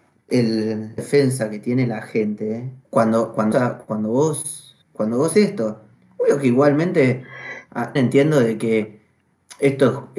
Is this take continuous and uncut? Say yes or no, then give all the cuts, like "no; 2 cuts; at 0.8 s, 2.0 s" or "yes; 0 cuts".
no; 7 cuts; at 1.0 s, 2.8 s, 3.5 s, 4.8 s, 5.3 s, 5.9 s, 8.0 s